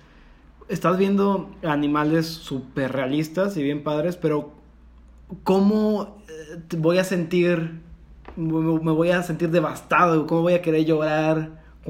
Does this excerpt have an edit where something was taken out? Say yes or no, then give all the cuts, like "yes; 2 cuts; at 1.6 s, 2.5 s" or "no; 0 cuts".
no; 0 cuts